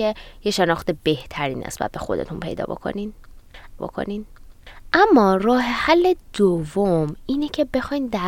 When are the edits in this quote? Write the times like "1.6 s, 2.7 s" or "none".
3.8 s